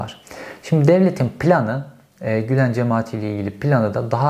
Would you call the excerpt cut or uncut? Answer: uncut